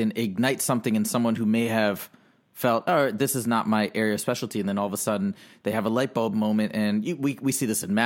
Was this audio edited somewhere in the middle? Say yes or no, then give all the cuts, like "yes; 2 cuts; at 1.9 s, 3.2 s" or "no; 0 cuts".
no; 0 cuts